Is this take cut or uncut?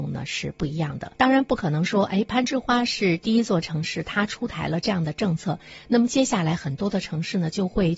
cut